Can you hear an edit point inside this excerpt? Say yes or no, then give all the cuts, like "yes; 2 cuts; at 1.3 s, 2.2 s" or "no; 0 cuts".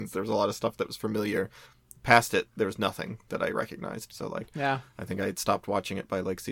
no; 0 cuts